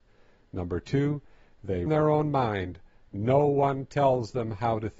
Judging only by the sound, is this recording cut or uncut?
cut